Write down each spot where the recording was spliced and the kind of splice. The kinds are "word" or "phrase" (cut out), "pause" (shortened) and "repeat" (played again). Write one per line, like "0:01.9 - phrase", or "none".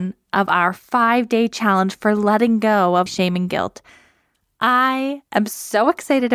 0:03.1 - word
0:05.3 - pause